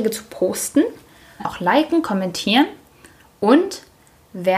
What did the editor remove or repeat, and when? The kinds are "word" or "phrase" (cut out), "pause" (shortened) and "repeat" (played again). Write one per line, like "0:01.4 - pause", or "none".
0:01.4 - phrase